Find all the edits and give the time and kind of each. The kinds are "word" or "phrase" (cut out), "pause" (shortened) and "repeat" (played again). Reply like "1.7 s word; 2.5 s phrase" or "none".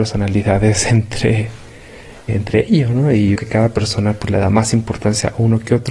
2.3 s word; 3.4 s word

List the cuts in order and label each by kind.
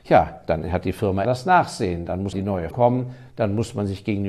1.2 s word; 2.3 s word; 2.7 s word

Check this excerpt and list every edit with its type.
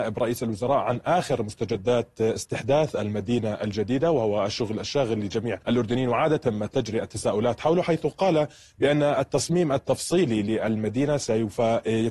5.6 s pause

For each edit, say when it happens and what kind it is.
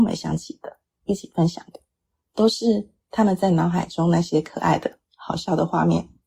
none

